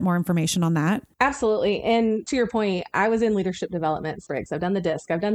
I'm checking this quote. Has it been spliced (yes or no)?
yes